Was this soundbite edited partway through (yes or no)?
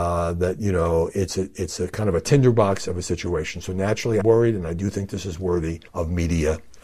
yes